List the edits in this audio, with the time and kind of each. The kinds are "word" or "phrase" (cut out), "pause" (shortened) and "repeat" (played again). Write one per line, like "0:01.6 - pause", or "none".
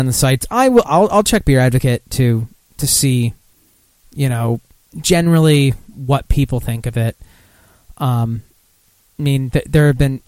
none